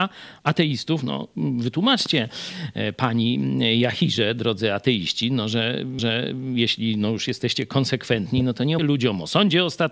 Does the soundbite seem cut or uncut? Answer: cut